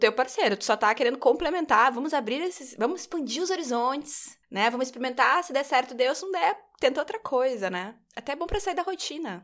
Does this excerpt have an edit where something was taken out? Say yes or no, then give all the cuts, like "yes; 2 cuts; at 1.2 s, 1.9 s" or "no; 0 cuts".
yes; 1 cut; at 4.4 s